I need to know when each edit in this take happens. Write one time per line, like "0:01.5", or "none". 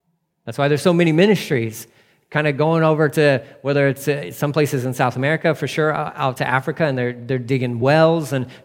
none

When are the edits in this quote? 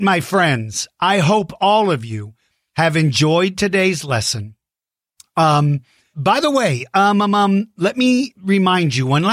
0:06.1

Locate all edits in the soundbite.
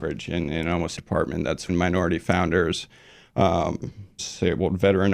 0:01.0
0:01.7
0:04.2

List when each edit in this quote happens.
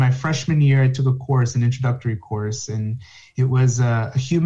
none

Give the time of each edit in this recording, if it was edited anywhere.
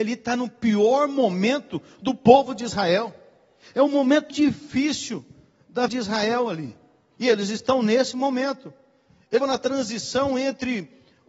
0:04.3
0:05.9
0:09.4

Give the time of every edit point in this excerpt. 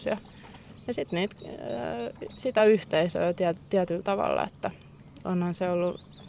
none

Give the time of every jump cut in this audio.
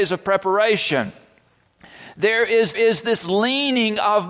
0:02.7

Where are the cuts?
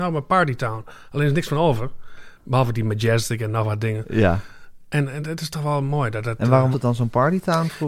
0:06.7

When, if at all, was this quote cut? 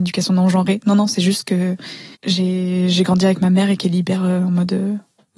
0:02.1

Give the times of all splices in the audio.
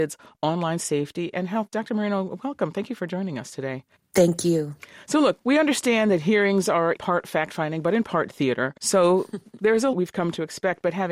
0:04.0
0:07.0
0:08.8
0:09.9

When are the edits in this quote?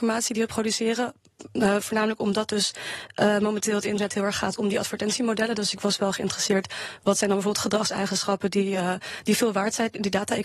none

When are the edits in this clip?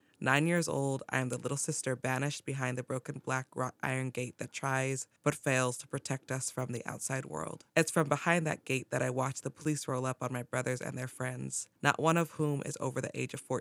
0:05.2
0:07.7
0:11.8

